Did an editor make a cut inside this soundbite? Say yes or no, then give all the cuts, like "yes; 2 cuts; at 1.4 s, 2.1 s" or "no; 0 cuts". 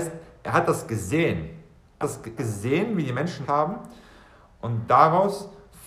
yes; 3 cuts; at 2.0 s, 2.4 s, 3.4 s